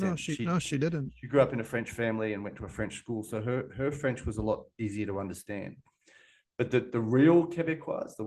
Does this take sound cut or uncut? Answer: uncut